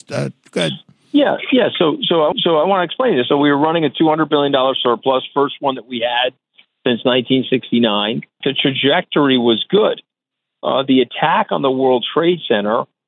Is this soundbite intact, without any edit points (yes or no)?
no